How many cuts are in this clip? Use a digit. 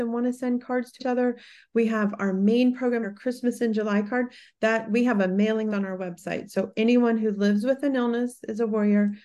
3